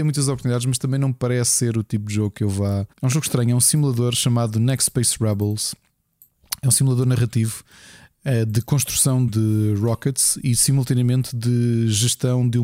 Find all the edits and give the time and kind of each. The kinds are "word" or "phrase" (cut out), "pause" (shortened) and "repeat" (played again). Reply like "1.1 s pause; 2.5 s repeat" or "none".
2.9 s pause; 9.3 s word